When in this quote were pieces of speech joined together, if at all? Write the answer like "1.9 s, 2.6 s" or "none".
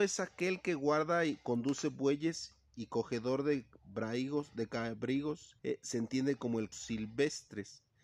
5.6 s, 6.7 s